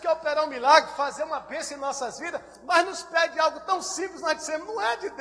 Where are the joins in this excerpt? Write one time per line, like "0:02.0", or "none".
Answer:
none